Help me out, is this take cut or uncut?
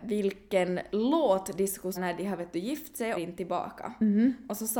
cut